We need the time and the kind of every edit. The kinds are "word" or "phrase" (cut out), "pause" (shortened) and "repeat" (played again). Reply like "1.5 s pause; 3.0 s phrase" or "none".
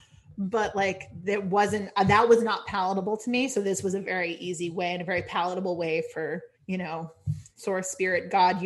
6.5 s pause